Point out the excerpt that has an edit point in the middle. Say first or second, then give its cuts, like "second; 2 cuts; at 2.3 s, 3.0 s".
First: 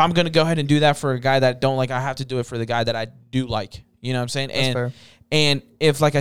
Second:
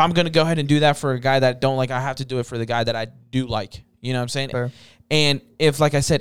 second; 1 cut; at 4.5 s